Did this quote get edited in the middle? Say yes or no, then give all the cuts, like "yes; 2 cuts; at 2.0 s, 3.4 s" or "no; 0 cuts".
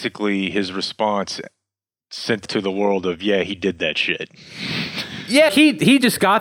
yes; 2 cuts; at 2.5 s, 5.5 s